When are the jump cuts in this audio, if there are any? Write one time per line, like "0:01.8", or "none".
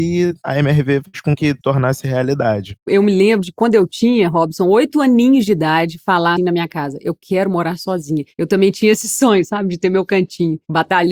0:01.6
0:06.4

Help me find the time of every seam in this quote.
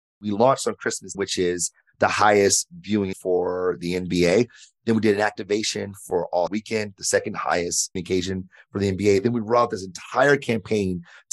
0:01.1
0:03.1
0:06.5
0:08.0

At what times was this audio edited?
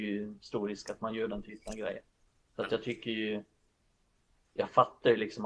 none

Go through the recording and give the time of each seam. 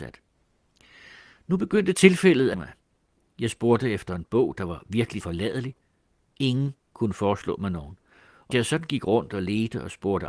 0:02.5
0:05.2
0:08.5

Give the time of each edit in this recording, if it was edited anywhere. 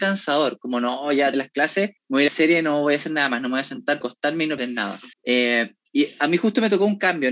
0:01.3
0:02.0
0:02.3
0:04.0
0:04.6
0:05.1

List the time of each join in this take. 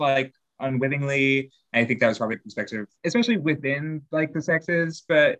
0:02.3
0:03.0

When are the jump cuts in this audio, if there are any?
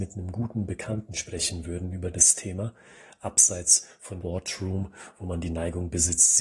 0:04.2

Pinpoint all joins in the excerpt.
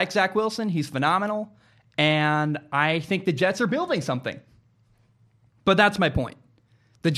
none

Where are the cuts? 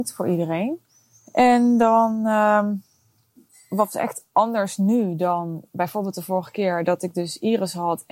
none

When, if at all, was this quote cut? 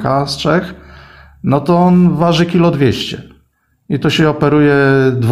none

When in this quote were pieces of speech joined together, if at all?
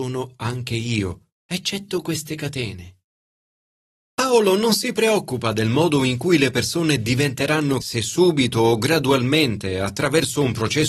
0:01.4
0:07.8

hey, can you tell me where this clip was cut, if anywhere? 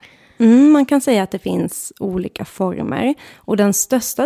none

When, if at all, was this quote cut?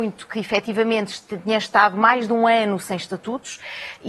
none

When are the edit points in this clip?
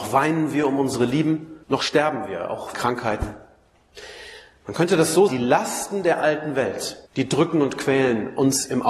0:01.6
0:02.7
0:05.3
0:07.1

